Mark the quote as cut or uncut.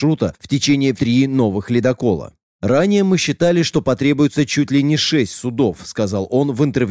cut